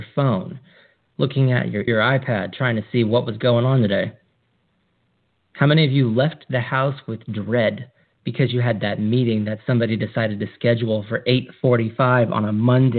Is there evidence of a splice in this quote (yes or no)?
yes